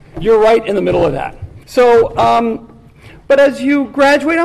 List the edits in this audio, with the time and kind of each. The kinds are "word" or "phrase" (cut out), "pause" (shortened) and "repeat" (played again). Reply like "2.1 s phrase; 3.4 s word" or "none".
1.6 s pause